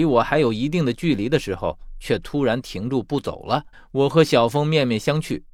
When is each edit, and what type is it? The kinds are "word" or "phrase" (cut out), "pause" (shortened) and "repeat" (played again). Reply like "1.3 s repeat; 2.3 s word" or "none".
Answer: 3.7 s pause